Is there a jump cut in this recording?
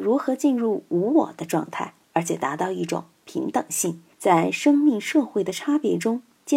yes; 2 cuts; at 2.0 s, 4.1 s

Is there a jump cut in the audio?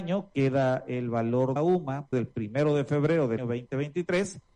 yes; 3 cuts; at 1.6 s, 2.1 s, 3.4 s

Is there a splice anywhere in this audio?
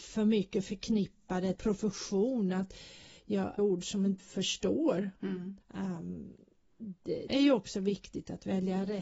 yes; 5 cuts; at 1.6 s, 3.6 s, 4.2 s, 5.6 s, 7.3 s

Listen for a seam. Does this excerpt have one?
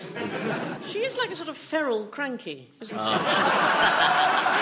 no; 0 cuts

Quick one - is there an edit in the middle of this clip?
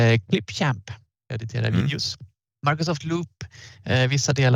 yes; 2 cuts; at 1.1 s, 2.5 s

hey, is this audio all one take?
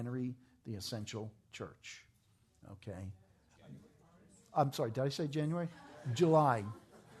yes; 0 cuts

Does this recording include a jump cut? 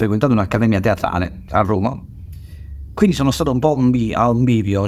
no; 0 cuts

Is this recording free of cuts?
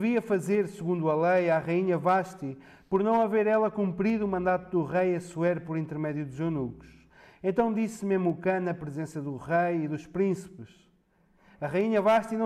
yes; 0 cuts

